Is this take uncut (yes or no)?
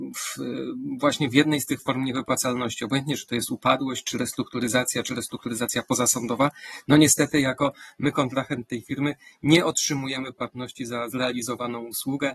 yes